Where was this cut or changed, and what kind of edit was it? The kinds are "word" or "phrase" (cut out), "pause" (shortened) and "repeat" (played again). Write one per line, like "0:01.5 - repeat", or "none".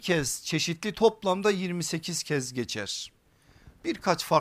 0:00.9 - word